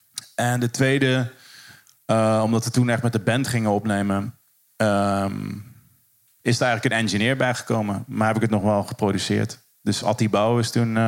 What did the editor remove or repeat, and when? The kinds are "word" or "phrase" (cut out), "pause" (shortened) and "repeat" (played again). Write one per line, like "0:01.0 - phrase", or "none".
none